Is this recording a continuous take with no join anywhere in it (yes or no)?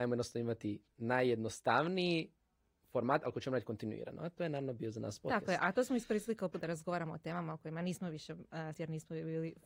no